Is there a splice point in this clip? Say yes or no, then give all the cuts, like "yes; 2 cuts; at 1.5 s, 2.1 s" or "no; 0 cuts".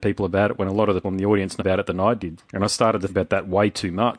yes; 4 cuts; at 1.0 s, 1.6 s, 2.4 s, 3.1 s